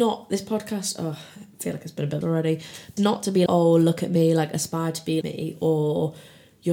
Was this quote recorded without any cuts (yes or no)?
no